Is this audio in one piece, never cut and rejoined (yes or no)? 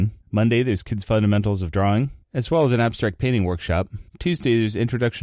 yes